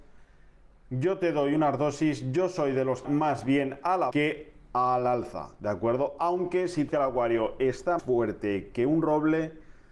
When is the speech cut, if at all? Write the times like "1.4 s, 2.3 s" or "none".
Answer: 3.0 s, 4.1 s, 6.9 s, 8.0 s